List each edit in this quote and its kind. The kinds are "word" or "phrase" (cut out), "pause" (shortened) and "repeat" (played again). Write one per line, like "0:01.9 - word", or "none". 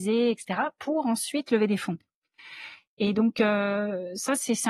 none